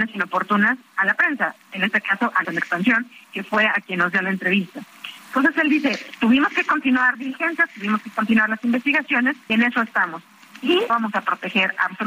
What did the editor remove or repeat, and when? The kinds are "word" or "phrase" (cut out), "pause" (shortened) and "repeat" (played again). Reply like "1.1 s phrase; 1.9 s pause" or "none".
2.4 s word; 7.1 s word; 9.5 s word; 10.9 s word